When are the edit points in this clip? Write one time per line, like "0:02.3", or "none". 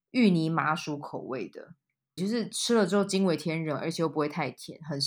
0:02.2